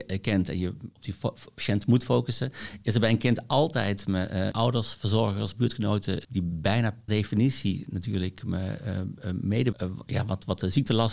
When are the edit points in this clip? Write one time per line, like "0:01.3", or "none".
0:04.5
0:06.2
0:07.1
0:09.7